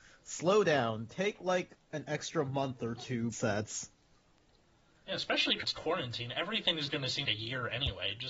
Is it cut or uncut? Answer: cut